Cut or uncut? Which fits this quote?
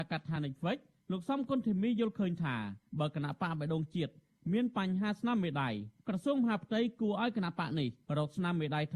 uncut